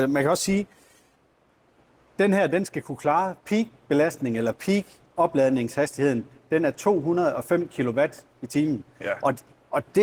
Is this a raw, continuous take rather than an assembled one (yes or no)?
yes